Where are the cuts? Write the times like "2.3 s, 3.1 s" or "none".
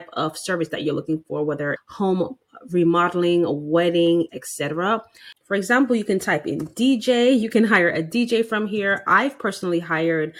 1.8 s, 4.3 s